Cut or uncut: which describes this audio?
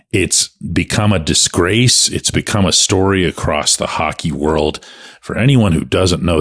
uncut